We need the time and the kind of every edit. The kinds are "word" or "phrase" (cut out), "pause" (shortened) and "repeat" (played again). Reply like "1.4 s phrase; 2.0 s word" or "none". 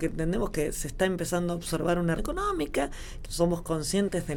2.2 s word; 3.2 s word